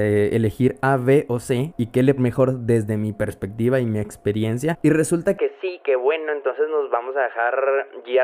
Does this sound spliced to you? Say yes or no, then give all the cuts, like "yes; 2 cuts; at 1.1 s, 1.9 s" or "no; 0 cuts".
yes; 1 cut; at 2.2 s